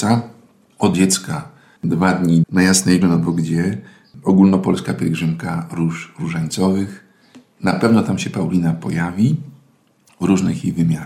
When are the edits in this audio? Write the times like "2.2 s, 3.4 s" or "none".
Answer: 0.9 s, 2.4 s, 3.0 s